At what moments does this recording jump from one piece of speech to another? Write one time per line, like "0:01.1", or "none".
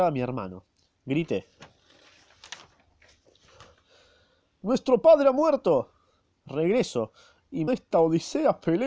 0:07.7